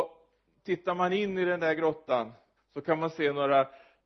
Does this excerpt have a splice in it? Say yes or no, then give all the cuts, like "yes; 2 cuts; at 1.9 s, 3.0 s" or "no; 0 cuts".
yes; 1 cut; at 2.6 s